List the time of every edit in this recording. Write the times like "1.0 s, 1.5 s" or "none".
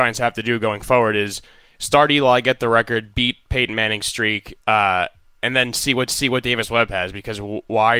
4.6 s, 6.1 s

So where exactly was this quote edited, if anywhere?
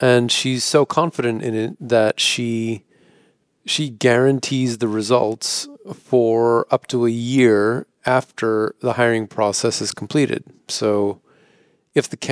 none

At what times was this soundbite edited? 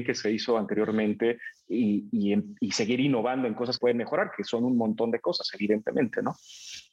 3.8 s

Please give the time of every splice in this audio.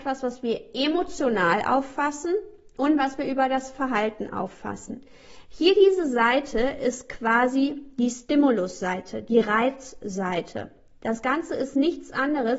none

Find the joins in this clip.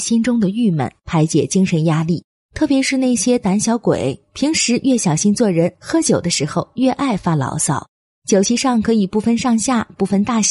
none

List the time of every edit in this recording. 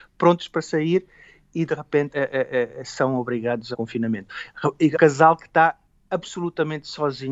2.1 s, 3.7 s, 4.9 s

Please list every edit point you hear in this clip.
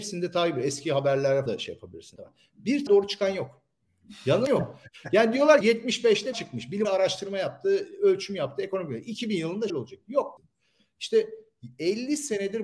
1.5 s, 2.2 s, 2.9 s, 4.5 s, 5.6 s, 6.3 s, 6.8 s, 9.7 s, 10.4 s

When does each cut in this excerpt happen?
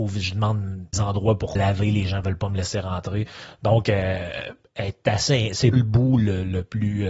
0.9 s, 1.5 s, 5.7 s

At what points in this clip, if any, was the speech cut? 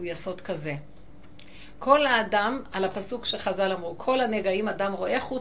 none

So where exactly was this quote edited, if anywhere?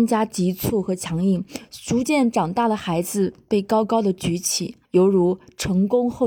4.8 s

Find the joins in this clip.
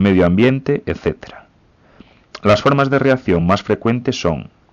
none

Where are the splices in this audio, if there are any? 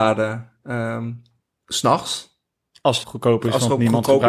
3.0 s

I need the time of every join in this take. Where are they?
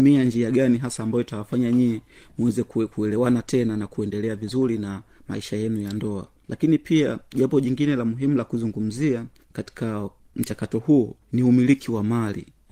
none

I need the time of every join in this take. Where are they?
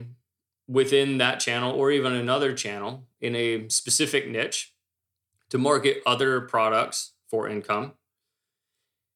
none

